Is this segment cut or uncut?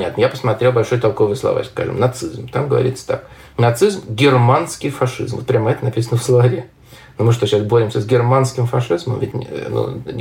cut